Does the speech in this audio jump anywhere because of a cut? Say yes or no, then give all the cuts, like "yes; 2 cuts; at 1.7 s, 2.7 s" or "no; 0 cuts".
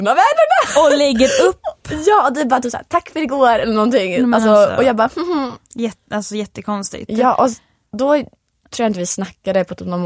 no; 0 cuts